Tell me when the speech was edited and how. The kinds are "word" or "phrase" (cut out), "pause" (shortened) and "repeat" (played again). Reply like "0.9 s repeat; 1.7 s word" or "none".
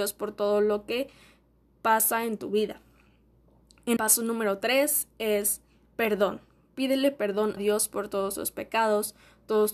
4.0 s word; 7.6 s word